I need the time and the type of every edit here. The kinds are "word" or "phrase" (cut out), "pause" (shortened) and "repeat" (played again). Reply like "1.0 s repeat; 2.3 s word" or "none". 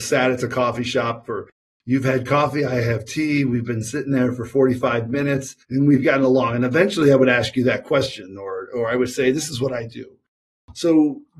5.6 s pause